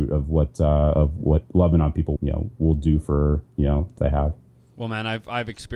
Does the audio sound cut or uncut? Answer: cut